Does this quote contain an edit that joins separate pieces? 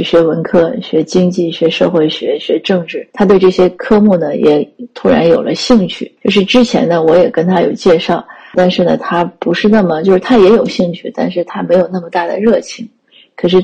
yes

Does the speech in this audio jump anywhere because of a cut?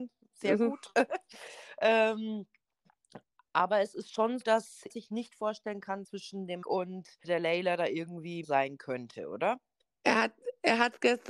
yes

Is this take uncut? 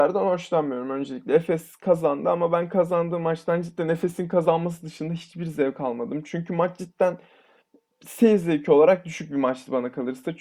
yes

